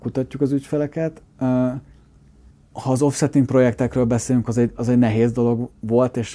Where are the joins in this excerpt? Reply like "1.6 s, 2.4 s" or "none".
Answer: 1.3 s